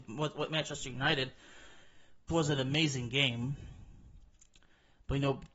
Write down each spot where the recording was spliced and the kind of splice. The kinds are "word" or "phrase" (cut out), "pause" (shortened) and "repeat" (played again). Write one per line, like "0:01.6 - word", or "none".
0:02.3 - word